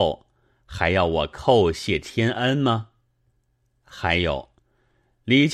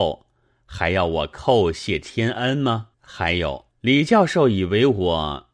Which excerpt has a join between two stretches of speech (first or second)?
second